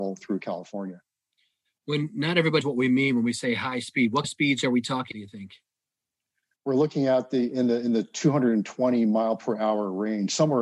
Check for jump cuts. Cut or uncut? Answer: cut